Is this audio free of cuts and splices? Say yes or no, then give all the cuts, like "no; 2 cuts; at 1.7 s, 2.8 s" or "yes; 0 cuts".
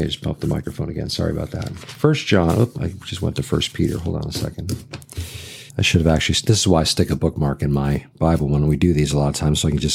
no; 1 cut; at 5.7 s